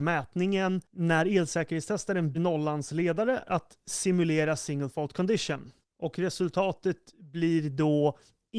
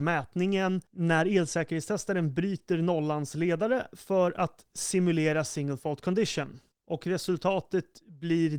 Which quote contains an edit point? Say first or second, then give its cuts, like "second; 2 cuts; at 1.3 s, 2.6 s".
first; 2 cuts; at 2.3 s, 3.5 s